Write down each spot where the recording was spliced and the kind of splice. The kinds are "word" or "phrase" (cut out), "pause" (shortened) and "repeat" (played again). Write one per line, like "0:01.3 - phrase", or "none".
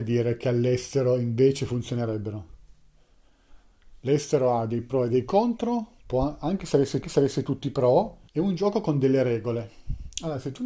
0:07.0 - repeat
0:08.3 - pause